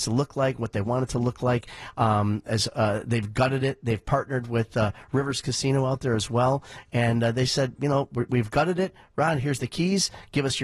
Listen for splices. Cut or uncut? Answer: cut